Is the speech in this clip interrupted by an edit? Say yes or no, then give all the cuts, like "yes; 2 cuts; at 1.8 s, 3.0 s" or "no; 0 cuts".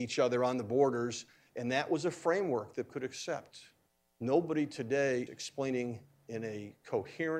yes; 3 cuts; at 2.9 s, 3.9 s, 5.3 s